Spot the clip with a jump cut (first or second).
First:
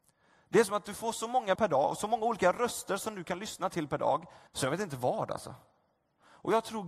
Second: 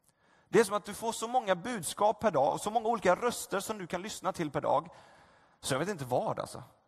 first